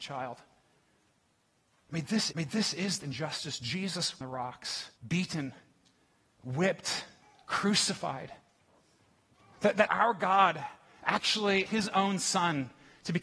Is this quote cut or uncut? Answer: cut